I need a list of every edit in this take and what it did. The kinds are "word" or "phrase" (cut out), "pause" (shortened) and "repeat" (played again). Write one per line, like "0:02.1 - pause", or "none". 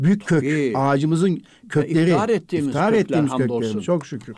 none